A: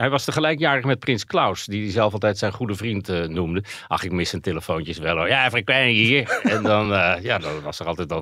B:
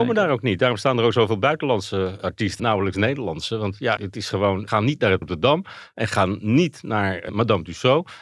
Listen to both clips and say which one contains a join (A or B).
B